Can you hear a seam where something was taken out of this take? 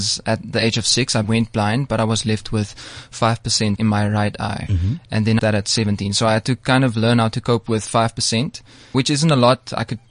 yes; 4 cuts; at 1.2 s, 3.8 s, 5.4 s, 8.9 s

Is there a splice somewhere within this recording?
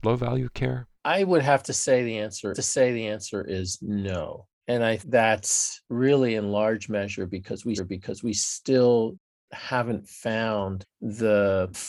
yes; 6 cuts; at 1.0 s, 2.5 s, 4.6 s, 5.0 s, 5.8 s, 7.8 s

